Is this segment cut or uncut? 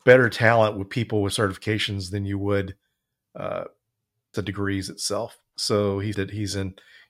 cut